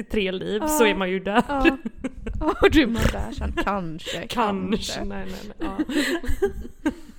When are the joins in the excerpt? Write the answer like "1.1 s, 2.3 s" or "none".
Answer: none